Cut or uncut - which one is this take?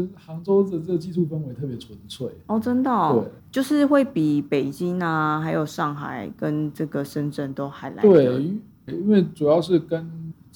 cut